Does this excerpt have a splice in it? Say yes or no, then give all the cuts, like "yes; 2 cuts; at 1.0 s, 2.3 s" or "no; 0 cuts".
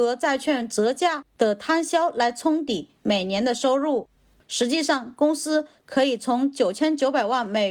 no; 0 cuts